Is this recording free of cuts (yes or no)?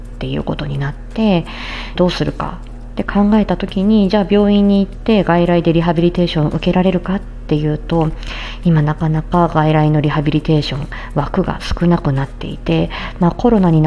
no